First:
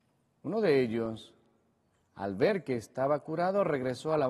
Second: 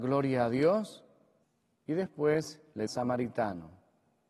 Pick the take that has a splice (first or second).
second